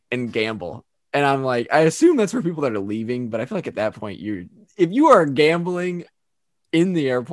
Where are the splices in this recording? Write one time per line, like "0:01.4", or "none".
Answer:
none